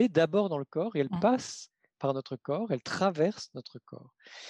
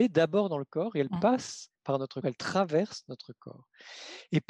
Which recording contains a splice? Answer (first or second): second